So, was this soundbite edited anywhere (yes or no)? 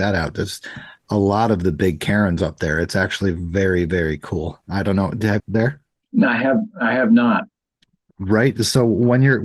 yes